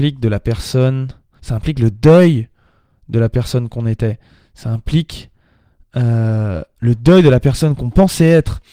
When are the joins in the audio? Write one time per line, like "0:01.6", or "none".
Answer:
none